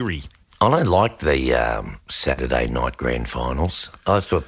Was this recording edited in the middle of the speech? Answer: no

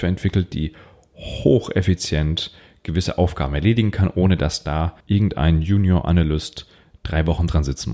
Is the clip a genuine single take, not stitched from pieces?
no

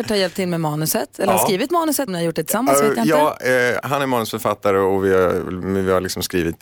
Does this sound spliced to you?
yes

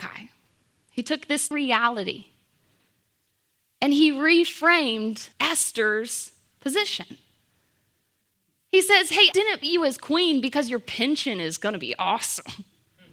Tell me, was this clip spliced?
yes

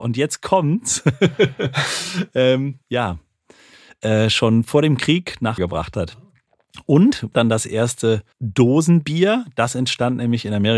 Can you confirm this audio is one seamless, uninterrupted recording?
no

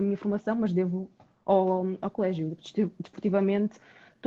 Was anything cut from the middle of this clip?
no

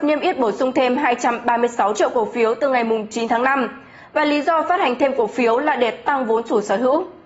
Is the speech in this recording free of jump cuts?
yes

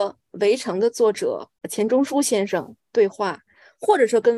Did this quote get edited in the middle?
yes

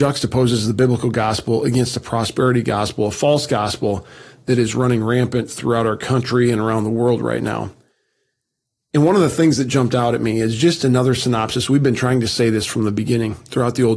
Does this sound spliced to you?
no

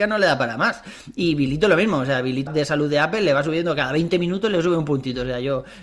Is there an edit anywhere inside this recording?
yes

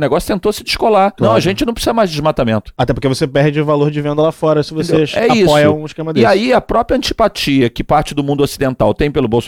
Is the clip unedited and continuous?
no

